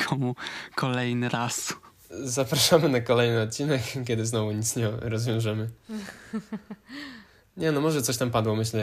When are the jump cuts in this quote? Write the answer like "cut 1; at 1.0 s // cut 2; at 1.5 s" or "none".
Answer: none